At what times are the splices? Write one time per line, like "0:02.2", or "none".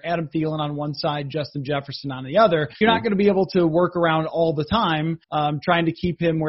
0:02.8
0:05.2